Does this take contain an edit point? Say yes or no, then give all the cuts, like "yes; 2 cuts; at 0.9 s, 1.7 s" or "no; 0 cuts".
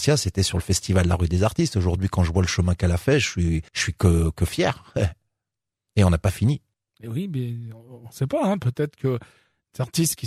yes; 2 cuts; at 3.7 s, 6.7 s